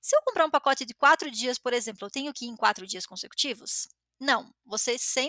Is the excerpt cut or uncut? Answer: uncut